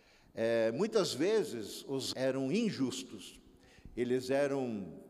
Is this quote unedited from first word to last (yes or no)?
no